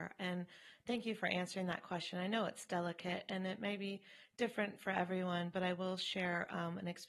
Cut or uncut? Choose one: uncut